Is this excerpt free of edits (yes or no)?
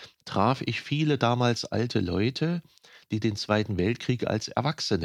yes